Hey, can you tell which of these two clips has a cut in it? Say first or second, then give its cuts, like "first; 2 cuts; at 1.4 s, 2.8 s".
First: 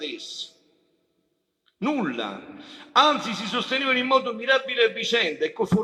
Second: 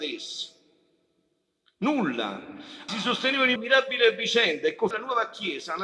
second; 3 cuts; at 2.9 s, 3.6 s, 4.9 s